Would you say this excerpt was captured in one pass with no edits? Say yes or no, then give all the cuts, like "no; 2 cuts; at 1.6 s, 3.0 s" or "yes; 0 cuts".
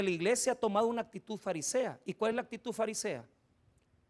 yes; 0 cuts